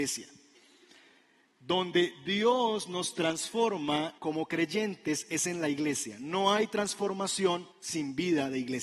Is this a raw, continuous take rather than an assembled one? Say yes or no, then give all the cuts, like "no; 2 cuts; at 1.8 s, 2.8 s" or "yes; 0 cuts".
no; 2 cuts; at 4.2 s, 7.7 s